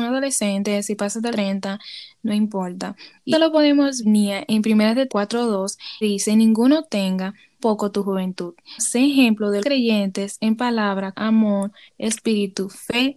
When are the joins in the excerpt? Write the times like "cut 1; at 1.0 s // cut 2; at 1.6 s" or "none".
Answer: cut 1; at 1.3 s // cut 2; at 3.3 s // cut 3; at 4.0 s // cut 4; at 5.1 s // cut 5; at 6.0 s // cut 6; at 7.6 s // cut 7; at 8.8 s // cut 8; at 9.6 s // cut 9; at 11.1 s